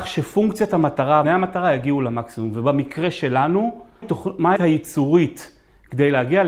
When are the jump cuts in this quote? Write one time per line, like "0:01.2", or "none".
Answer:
0:01.2
0:04.0
0:04.6